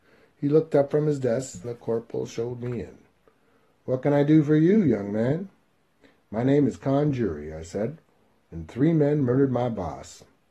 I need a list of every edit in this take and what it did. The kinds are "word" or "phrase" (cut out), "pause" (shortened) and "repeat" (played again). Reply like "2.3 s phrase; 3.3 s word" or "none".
1.6 s word